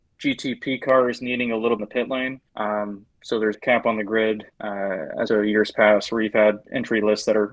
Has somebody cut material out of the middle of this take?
yes; 5 cuts; at 1.8 s, 2.5 s, 3.5 s, 4.5 s, 5.3 s

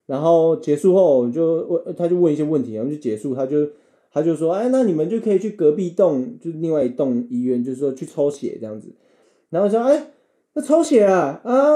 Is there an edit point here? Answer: no; 0 cuts

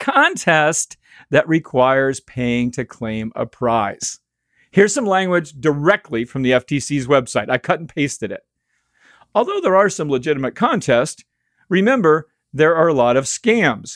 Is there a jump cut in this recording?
no; 0 cuts

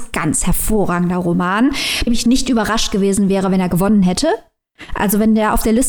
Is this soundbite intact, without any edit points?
no; 1 cut; at 2.1 s

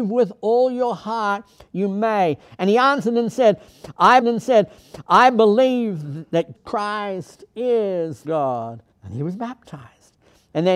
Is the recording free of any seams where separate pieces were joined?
no; 4 cuts; at 4.2 s, 6.5 s, 8.2 s, 8.9 s

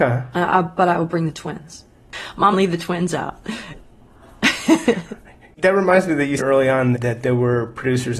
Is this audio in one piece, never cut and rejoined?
no; 4 cuts; at 2.5 s, 5.6 s, 6.4 s, 6.9 s

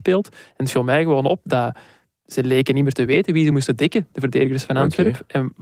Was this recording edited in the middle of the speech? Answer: no; 0 cuts

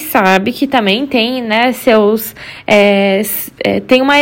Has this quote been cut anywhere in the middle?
no; 0 cuts

